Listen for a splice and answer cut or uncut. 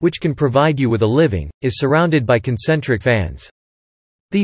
cut